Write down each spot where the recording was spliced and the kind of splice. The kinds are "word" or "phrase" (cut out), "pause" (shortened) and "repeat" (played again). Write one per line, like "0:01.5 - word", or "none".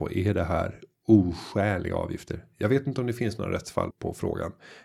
0:03.9 - word